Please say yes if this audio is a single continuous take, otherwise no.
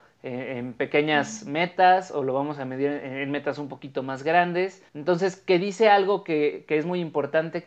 no